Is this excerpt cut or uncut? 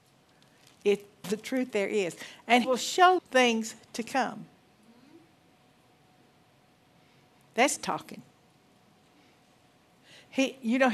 cut